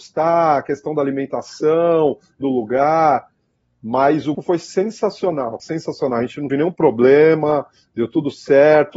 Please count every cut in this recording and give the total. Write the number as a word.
four